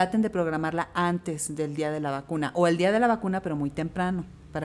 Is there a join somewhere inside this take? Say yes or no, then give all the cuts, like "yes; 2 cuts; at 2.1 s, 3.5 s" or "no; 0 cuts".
no; 0 cuts